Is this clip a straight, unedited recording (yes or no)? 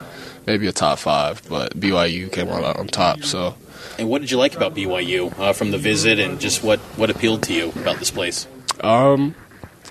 yes